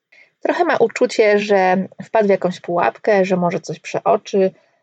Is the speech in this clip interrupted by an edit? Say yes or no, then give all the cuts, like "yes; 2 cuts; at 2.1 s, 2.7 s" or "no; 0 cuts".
no; 0 cuts